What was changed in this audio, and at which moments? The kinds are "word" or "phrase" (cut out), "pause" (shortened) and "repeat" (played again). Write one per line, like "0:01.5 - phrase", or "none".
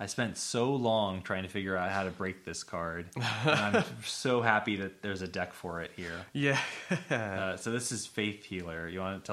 none

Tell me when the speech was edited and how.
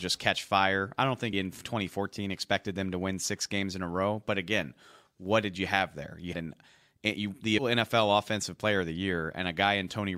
0:01.3 - word
0:06.3 - word
0:07.6 - word

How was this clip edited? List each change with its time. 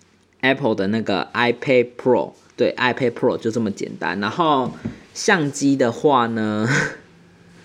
0:02.5 - pause

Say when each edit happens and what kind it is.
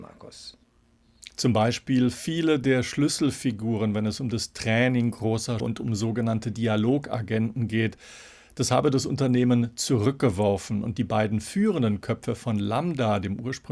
0:05.6 - word

